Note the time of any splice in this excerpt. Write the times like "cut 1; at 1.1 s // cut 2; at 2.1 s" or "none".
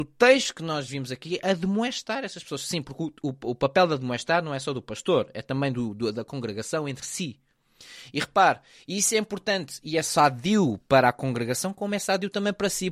none